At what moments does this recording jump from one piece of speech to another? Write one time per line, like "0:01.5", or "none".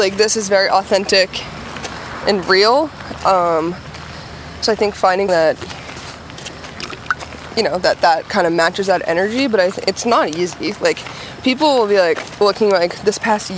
0:05.3